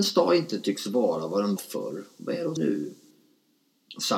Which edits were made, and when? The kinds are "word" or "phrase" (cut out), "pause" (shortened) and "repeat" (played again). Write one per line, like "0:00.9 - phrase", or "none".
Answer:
0:01.6 - word
0:02.6 - word